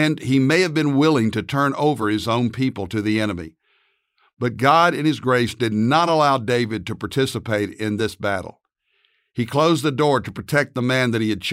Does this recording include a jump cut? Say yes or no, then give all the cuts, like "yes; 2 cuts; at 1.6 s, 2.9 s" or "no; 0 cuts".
no; 0 cuts